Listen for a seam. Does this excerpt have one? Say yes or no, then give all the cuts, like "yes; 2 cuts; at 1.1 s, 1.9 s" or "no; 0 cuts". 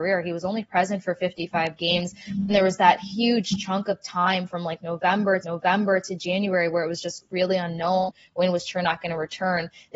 yes; 1 cut; at 5.4 s